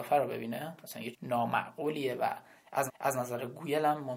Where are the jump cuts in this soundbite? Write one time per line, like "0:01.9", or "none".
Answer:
0:01.1
0:02.9